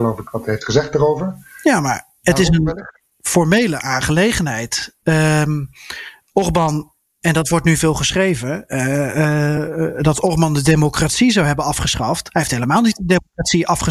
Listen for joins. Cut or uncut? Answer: uncut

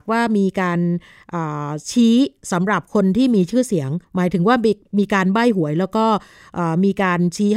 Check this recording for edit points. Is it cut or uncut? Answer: cut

